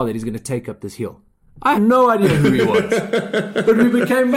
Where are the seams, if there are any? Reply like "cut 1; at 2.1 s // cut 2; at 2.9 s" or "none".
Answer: cut 1; at 1.7 s